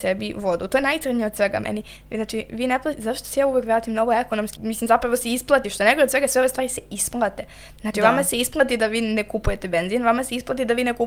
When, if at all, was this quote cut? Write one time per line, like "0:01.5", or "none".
0:04.5